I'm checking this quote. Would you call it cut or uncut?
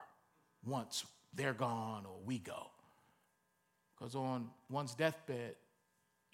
uncut